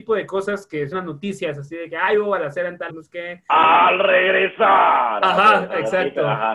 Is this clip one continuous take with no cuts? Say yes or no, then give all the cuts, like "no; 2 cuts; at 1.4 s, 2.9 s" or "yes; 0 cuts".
no; 2 cuts; at 0.9 s, 2.9 s